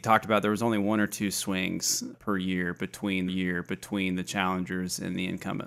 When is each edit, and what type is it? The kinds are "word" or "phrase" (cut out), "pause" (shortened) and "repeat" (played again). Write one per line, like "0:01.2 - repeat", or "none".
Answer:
0:02.1 - word
0:03.3 - repeat